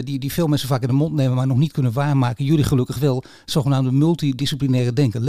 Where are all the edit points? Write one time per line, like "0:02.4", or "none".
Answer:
none